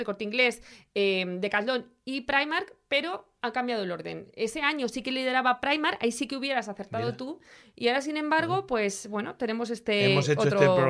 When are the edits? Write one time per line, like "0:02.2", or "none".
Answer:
none